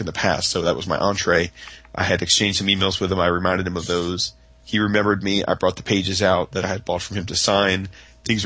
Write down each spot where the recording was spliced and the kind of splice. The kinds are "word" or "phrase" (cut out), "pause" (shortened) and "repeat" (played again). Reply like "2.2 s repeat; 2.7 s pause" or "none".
none